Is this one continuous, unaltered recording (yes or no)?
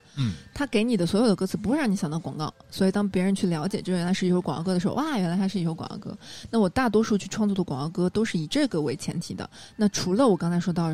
yes